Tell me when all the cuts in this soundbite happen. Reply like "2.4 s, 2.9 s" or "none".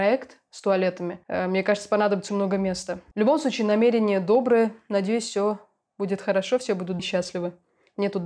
2.3 s, 7.0 s